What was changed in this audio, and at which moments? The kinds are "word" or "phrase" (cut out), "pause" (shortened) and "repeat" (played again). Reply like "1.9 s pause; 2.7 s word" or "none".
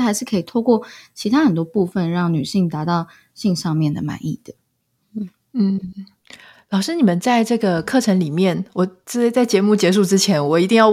none